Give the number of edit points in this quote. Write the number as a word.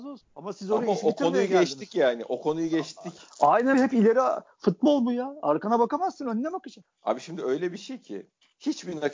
one